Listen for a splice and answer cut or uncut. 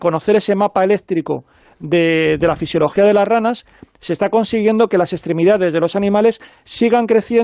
uncut